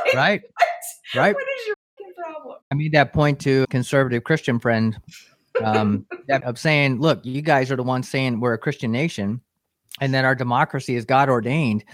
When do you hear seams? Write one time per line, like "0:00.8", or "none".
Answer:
0:02.6
0:03.6
0:06.4